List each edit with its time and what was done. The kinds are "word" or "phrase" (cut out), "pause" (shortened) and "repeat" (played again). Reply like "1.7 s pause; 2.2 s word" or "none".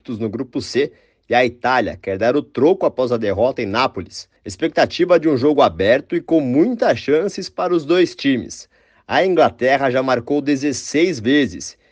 4.4 s pause